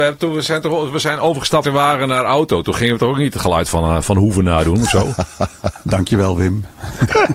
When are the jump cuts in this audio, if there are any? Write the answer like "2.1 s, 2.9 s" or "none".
1.6 s